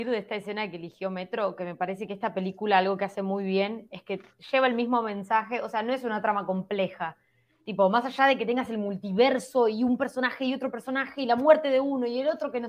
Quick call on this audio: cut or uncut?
uncut